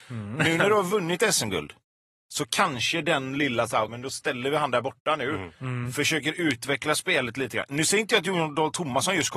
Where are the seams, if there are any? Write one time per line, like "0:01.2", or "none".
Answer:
0:03.9